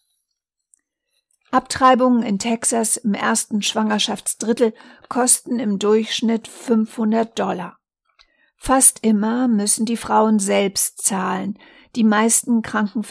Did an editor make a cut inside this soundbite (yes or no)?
no